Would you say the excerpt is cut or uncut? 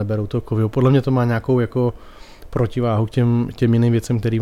uncut